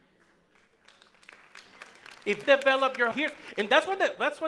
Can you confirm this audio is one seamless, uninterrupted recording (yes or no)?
no